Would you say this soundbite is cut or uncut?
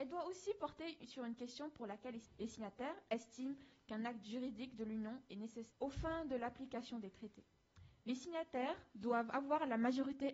uncut